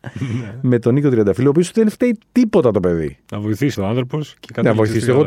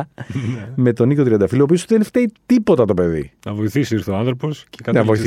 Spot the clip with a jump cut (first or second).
first